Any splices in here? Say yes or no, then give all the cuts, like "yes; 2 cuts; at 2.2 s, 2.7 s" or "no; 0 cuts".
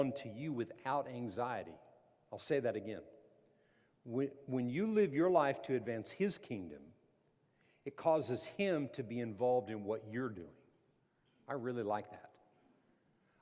no; 0 cuts